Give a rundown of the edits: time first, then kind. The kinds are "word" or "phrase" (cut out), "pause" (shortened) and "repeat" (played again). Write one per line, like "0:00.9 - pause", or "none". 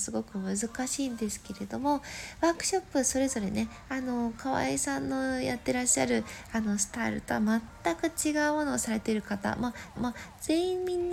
0:10.0 - repeat